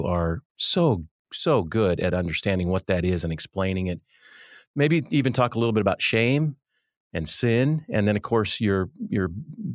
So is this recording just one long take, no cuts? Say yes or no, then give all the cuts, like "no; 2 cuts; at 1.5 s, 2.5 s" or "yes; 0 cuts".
yes; 0 cuts